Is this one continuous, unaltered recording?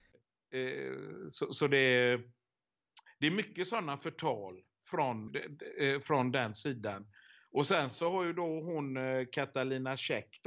no; 1 cut; at 5.3 s

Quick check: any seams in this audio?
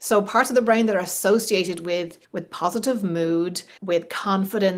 yes; 2 cuts; at 2.2 s, 3.8 s

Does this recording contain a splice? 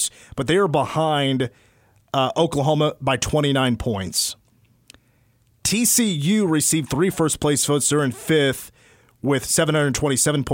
no; 0 cuts

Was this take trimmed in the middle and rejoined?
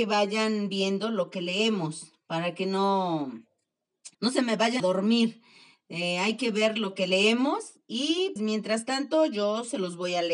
yes; 3 cuts; at 4.1 s, 4.8 s, 8.4 s

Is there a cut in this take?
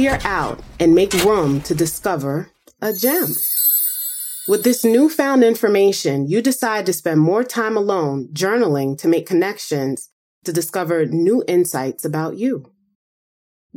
no; 0 cuts

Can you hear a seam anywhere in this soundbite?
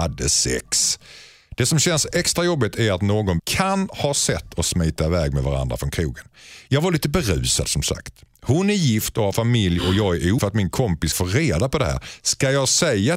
yes; 3 cuts; at 3.4 s, 10.4 s, 11.1 s

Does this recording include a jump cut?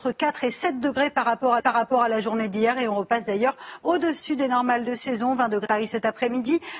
yes; 2 cuts; at 1.6 s, 5.7 s

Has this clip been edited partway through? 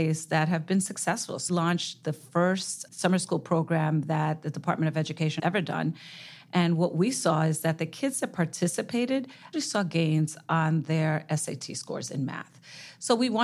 yes; 4 cuts; at 1.5 s, 2.9 s, 5.4 s, 9.5 s

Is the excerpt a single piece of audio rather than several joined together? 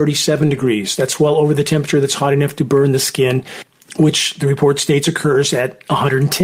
yes; 0 cuts

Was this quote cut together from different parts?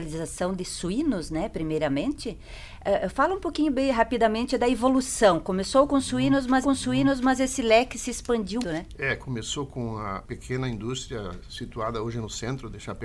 yes; 2 cuts; at 6.6 s, 8.6 s

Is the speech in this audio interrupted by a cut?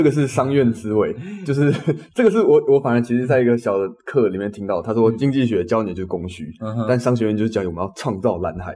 no; 0 cuts

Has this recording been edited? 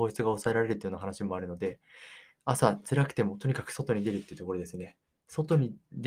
yes; 1 cut; at 5.1 s

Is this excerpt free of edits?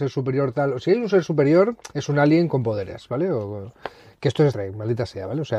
no; 2 cuts; at 1.9 s, 4.5 s

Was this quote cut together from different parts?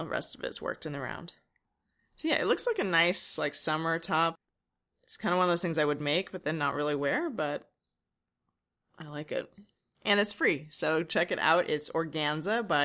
no; 0 cuts

